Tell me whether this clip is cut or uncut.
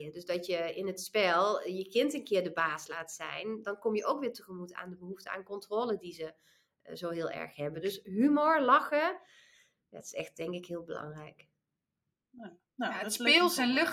uncut